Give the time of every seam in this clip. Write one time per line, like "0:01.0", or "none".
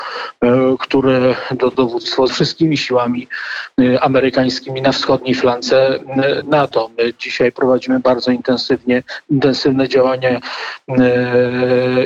0:01.7
0:02.3